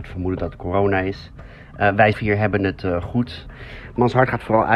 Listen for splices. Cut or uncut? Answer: cut